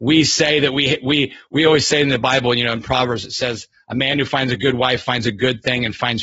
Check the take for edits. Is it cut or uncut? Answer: uncut